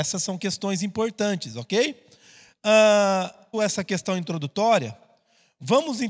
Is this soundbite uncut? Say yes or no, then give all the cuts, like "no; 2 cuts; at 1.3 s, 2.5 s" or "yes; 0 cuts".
no; 1 cut; at 3.5 s